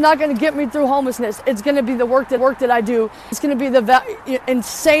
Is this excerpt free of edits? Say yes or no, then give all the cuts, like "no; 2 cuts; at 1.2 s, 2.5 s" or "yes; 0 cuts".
no; 2 cuts; at 2.4 s, 3.3 s